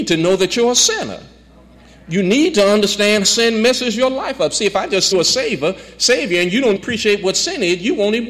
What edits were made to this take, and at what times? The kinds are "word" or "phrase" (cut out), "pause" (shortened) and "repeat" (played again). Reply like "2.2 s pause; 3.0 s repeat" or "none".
3.2 s word; 5.1 s phrase; 6.8 s word